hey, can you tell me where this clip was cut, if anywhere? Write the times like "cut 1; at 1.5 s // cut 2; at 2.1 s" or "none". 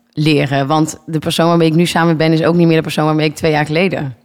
none

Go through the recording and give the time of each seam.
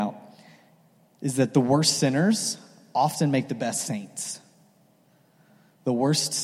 none

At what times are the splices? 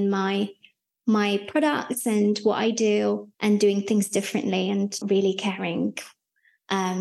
cut 1; at 3.3 s // cut 2; at 5.0 s

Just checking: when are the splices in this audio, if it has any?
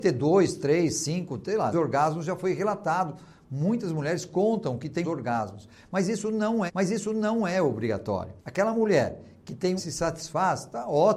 cut 1; at 1.7 s // cut 2; at 5.0 s // cut 3; at 6.7 s // cut 4; at 8.4 s // cut 5; at 9.8 s

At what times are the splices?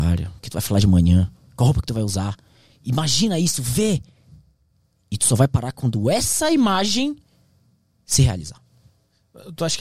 none

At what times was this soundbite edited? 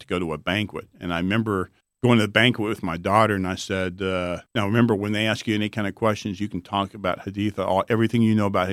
cut 1; at 1.8 s // cut 2; at 4.5 s

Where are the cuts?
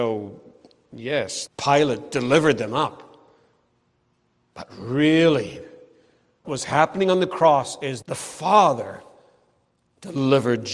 cut 1; at 1.5 s // cut 2; at 6.4 s // cut 3; at 8.0 s

